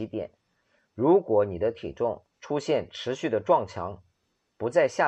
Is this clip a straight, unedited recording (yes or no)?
no